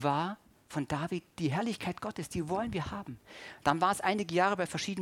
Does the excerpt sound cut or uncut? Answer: uncut